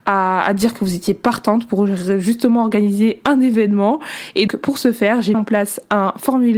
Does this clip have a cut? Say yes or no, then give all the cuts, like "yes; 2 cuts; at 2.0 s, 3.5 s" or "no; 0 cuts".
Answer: yes; 2 cuts; at 4.5 s, 5.3 s